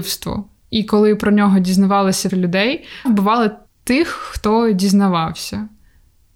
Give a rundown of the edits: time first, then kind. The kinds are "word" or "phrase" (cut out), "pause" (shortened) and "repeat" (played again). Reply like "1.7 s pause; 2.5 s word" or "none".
2.3 s phrase; 3.1 s word; 3.7 s pause